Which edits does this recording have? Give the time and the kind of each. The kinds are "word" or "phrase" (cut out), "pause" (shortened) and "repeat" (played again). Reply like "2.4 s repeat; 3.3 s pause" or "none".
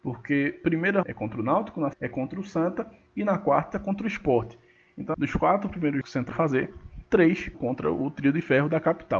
1.0 s word; 1.9 s word; 5.1 s word; 6.0 s word; 6.3 s word; 7.5 s word